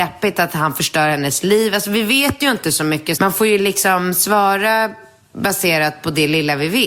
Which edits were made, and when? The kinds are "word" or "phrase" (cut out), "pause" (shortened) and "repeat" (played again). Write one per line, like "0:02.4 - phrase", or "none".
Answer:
0:03.1 - phrase